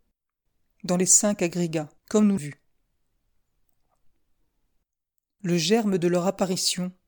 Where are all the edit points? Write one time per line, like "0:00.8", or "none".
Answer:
0:02.0
0:02.4